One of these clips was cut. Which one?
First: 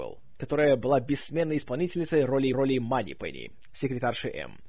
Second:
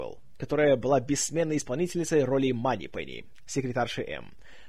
first; 1 cut; at 2.5 s

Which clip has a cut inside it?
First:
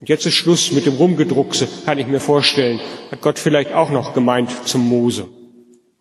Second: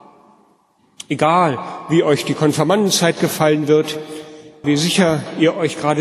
second; 1 cut; at 4.6 s

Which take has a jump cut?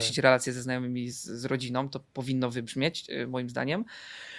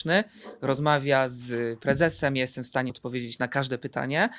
second; 1 cut; at 2.9 s

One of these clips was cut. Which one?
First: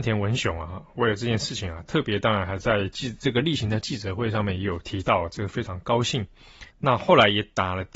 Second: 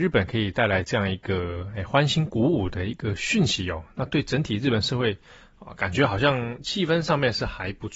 first; 1 cut; at 6.7 s

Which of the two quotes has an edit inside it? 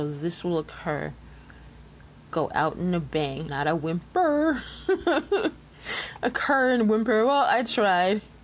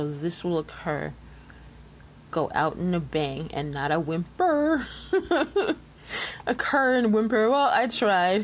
first; 1 cut; at 3.5 s

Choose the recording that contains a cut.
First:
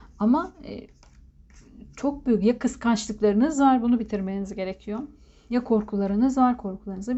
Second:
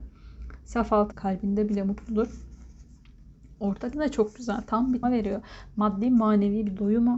second; 3 cuts; at 1.1 s, 3.9 s, 5.0 s

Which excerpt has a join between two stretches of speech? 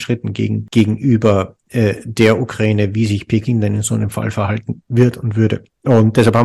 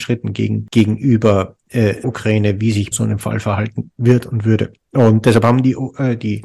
second; 2 cuts; at 2.0 s, 2.9 s

